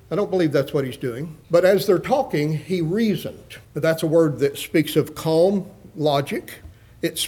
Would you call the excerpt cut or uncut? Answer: cut